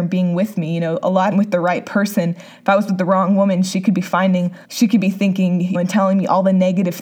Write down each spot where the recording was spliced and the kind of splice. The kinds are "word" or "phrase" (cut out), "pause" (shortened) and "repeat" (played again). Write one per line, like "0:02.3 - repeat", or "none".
0:01.3 - phrase
0:04.6 - pause
0:05.7 - word